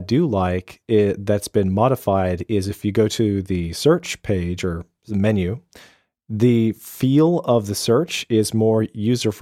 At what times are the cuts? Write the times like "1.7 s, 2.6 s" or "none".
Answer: none